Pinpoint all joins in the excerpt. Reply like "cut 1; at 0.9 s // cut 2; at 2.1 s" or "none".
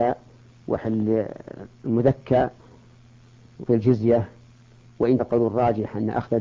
cut 1; at 3.7 s // cut 2; at 5.2 s